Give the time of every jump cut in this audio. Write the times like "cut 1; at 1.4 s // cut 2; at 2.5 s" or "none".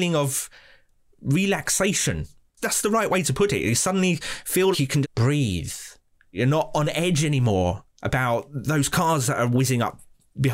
cut 1; at 4.7 s // cut 2; at 5.0 s